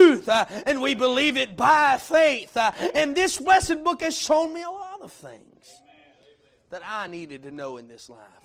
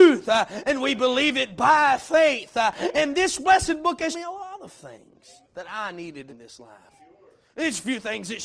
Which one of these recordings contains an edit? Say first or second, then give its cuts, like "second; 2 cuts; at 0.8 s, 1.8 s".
second; 3 cuts; at 4.1 s, 5.4 s, 6.3 s